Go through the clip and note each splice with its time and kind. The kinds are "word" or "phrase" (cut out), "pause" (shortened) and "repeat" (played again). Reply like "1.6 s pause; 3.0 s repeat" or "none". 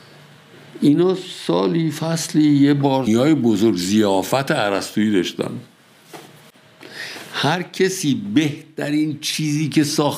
3.1 s phrase